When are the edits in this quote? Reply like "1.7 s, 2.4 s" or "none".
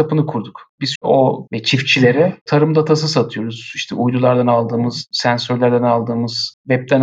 0.9 s, 1.5 s